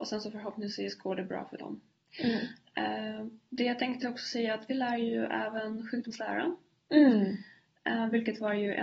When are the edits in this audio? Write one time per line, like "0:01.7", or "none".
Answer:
none